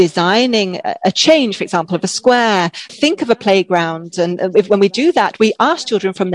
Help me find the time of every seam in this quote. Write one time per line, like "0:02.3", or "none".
0:02.9